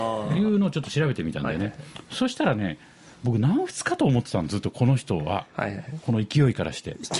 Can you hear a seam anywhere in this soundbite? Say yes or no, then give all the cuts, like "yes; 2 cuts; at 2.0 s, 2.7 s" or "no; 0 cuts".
no; 0 cuts